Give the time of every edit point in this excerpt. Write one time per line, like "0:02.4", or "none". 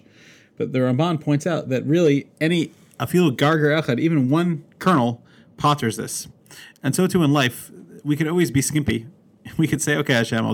none